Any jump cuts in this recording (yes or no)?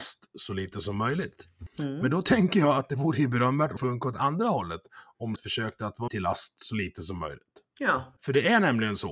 yes